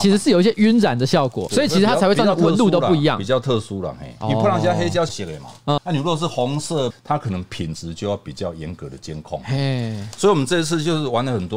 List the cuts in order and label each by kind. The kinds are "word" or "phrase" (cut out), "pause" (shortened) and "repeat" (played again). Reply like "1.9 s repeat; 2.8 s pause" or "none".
1.5 s phrase; 5.1 s word; 5.8 s word; 6.9 s phrase